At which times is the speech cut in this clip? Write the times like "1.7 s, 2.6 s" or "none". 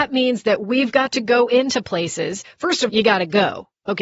2.9 s